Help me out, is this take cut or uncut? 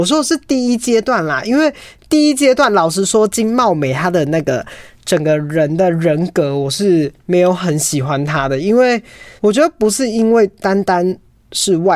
cut